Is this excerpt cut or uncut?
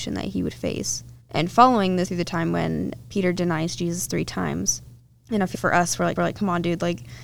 cut